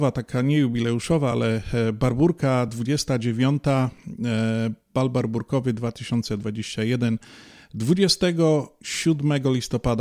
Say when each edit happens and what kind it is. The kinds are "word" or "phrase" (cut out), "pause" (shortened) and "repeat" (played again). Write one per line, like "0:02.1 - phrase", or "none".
none